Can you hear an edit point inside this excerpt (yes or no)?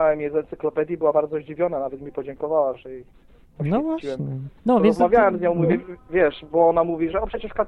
yes